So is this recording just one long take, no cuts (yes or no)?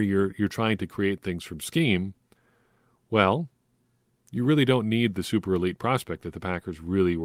yes